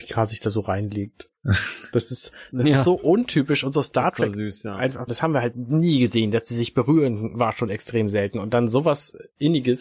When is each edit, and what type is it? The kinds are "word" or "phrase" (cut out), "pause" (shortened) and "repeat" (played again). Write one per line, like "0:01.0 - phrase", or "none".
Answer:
0:01.4 - pause
0:05.1 - word